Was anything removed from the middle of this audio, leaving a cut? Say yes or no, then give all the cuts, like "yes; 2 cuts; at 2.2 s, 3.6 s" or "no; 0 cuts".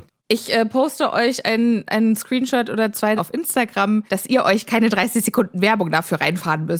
yes; 2 cuts; at 3.2 s, 4.1 s